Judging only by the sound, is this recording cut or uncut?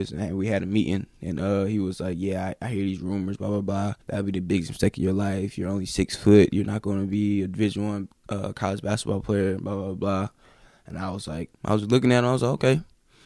cut